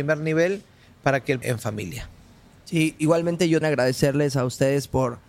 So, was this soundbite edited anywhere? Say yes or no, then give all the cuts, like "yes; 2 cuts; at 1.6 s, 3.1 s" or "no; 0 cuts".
yes; 2 cuts; at 1.4 s, 3.6 s